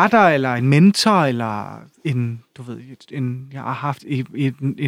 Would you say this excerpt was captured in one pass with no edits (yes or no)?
no